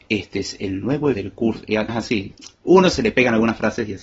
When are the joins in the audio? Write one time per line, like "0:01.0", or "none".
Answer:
0:01.1
0:01.9